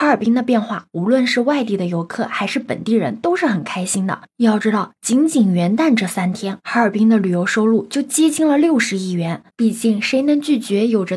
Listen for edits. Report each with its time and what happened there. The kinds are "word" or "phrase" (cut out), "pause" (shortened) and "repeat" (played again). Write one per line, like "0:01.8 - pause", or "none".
0:09.5 - pause